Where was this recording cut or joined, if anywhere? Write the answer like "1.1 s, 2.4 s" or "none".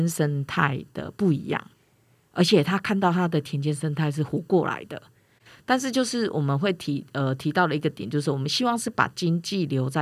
none